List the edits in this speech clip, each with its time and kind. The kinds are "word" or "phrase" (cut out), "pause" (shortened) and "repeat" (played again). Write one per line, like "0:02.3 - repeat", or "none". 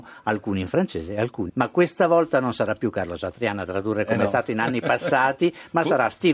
0:01.5 - phrase